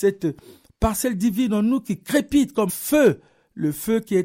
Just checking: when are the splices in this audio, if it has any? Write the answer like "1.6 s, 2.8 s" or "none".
2.7 s